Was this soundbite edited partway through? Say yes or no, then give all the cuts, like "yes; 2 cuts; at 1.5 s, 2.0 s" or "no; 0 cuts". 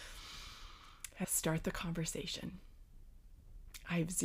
yes; 1 cut; at 1.2 s